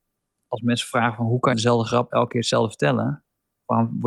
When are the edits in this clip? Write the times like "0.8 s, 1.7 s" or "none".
1.5 s